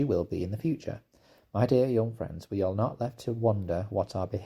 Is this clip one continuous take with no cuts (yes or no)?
yes